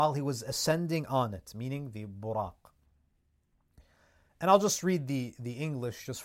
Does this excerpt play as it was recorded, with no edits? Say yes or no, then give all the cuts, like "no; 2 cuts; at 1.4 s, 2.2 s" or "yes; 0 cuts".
yes; 0 cuts